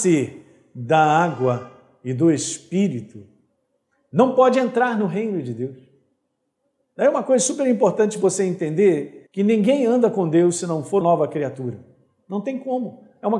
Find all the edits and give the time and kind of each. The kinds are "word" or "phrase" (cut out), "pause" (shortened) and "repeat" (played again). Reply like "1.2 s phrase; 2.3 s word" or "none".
9.3 s pause; 11.0 s word